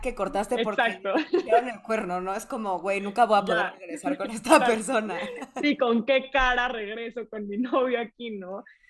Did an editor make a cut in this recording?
no; 0 cuts

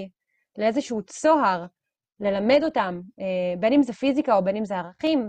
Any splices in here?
no; 0 cuts

